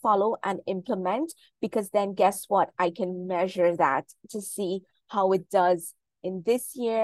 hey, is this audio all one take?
yes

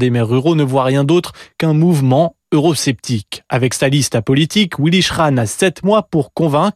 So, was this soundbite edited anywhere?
no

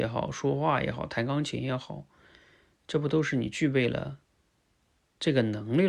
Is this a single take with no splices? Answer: yes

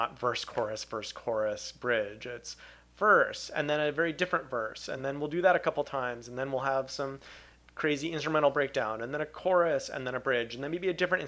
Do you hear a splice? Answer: no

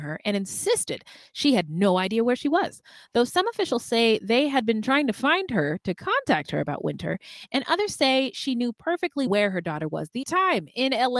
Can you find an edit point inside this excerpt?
yes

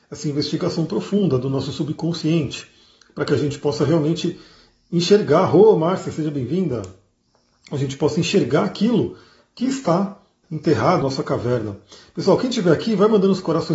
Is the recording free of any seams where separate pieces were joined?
no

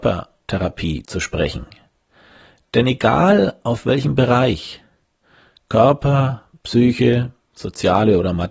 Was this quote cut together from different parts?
no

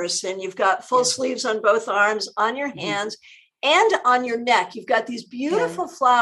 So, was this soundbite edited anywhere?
no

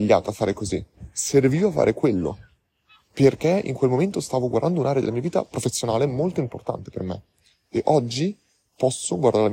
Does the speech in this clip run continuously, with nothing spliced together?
yes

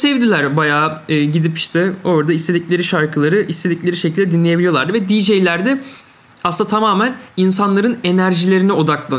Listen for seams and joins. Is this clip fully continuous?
yes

